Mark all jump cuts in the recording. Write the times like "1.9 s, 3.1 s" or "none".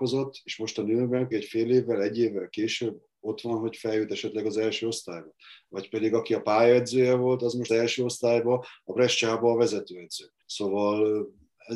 1.3 s, 7.7 s, 10.4 s